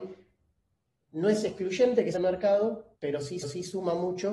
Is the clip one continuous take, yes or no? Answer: no